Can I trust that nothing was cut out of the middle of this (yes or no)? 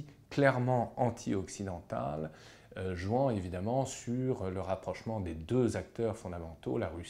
yes